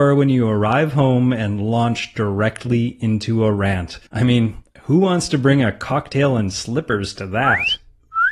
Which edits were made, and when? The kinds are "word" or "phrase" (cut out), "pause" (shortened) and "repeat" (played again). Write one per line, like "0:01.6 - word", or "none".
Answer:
0:04.1 - pause